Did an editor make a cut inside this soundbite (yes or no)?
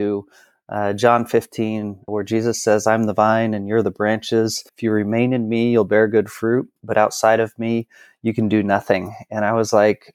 yes